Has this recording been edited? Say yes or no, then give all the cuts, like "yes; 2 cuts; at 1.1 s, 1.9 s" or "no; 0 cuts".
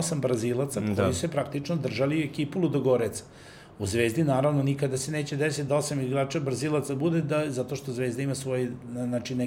no; 0 cuts